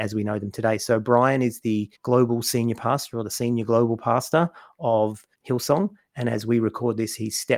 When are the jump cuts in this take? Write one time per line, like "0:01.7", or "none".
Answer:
0:01.9
0:05.3